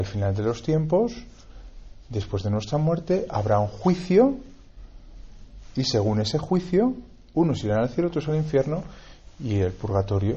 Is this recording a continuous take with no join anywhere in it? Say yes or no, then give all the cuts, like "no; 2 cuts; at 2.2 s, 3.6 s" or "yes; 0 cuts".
yes; 0 cuts